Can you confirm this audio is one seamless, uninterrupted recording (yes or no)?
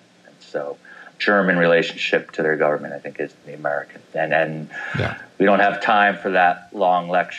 no